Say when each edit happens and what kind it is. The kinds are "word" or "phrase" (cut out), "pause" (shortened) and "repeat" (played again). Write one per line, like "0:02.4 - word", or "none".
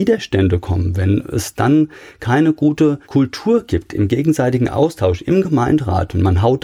0:03.0 - pause